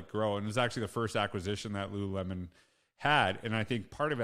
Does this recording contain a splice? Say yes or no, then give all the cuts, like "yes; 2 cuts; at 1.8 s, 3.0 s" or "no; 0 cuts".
no; 0 cuts